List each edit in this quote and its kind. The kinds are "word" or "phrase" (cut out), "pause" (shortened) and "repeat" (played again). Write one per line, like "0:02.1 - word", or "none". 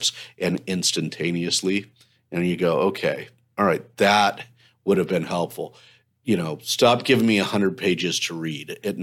none